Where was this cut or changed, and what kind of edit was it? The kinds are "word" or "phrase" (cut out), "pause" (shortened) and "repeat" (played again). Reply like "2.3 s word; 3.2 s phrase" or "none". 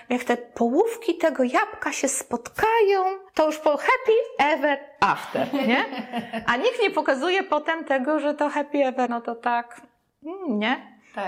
3.3 s pause; 9.1 s word

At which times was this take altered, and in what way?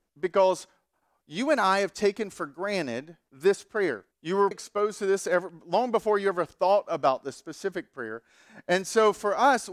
3.3 s pause; 4.1 s pause; 4.5 s word

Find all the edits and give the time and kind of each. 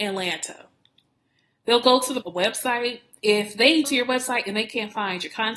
2.2 s phrase; 3.2 s pause; 3.8 s word

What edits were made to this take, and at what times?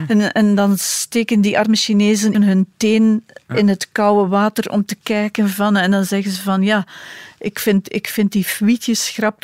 2.3 s word

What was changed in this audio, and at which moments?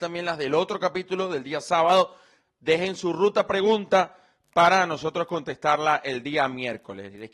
none

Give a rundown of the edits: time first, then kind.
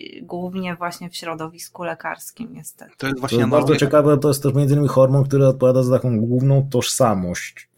4.2 s word

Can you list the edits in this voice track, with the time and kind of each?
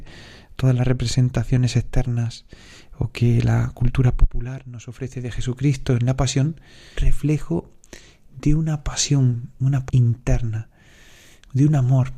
7.0 s word; 9.9 s word

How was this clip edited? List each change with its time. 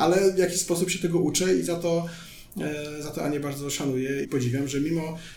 4.2 s word

